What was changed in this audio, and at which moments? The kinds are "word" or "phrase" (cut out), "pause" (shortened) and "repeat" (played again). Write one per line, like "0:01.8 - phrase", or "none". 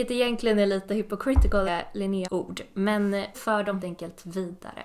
0:01.7 - phrase
0:02.2 - word
0:03.3 - word
0:03.8 - word